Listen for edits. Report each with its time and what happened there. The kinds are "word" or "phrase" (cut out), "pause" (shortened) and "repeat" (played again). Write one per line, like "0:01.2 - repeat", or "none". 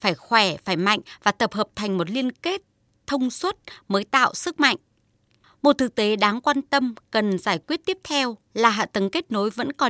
0:08.4 - pause